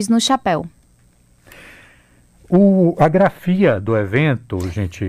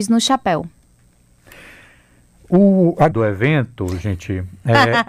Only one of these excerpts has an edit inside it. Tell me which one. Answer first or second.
second